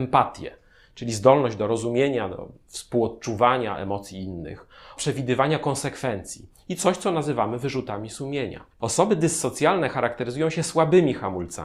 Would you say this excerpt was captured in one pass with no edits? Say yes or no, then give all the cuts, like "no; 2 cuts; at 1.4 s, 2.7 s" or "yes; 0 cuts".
no; 2 cuts; at 5.0 s, 8.7 s